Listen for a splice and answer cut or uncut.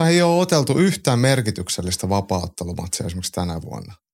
uncut